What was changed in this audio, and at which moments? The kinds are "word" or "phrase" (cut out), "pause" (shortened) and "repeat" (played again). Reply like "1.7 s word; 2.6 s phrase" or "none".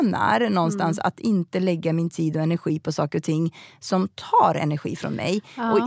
none